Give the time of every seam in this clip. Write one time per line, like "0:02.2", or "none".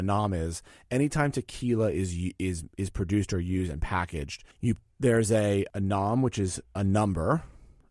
0:04.5